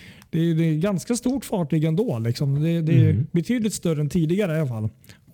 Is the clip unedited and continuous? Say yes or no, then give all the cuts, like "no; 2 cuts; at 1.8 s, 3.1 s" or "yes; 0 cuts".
yes; 0 cuts